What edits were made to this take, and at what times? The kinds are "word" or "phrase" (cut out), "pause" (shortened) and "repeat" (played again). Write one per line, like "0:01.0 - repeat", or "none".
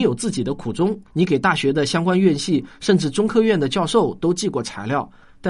0:01.0 - pause